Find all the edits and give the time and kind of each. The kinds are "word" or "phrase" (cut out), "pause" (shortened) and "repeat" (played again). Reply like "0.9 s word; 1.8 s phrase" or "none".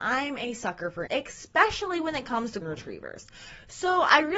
1.1 s word; 2.6 s word

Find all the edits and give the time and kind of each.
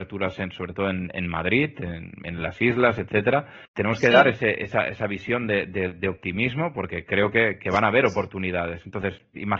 3.7 s pause

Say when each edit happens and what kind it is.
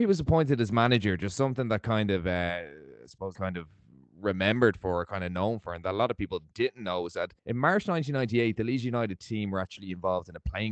3.3 s phrase; 6.5 s word; 7.4 s pause

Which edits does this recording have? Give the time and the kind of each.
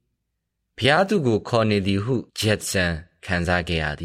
2.3 s pause

